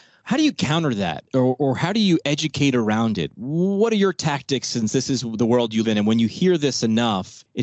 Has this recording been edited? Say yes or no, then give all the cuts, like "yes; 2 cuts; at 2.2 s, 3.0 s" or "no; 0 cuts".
yes; 2 cuts; at 1.3 s, 5.8 s